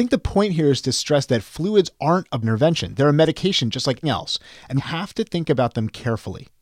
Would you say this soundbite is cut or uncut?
cut